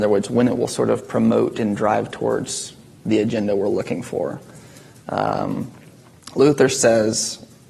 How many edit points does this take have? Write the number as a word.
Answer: zero